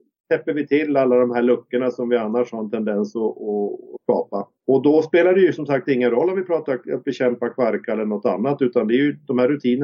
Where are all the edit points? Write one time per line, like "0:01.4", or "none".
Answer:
0:04.6